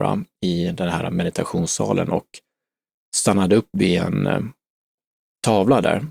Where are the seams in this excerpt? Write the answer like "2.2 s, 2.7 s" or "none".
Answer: none